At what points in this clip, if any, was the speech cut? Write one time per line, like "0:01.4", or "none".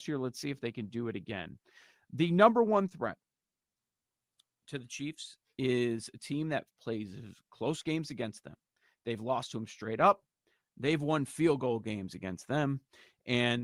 none